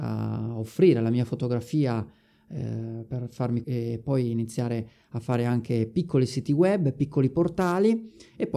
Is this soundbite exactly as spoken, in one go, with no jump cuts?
no; 2 cuts; at 3.1 s, 3.6 s

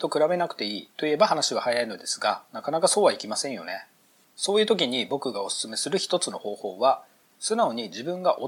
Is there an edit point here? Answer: no; 0 cuts

